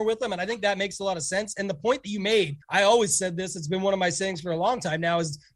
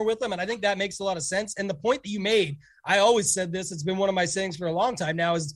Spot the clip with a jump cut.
first; 1 cut; at 2.6 s

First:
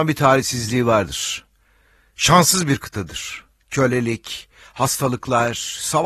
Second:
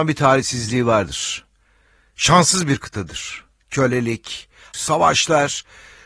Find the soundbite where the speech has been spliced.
second; 1 cut; at 4.7 s

